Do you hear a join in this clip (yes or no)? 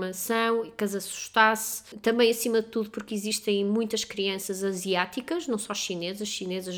no